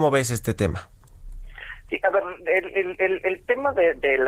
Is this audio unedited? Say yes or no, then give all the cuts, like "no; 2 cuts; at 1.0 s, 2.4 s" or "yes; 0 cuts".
yes; 0 cuts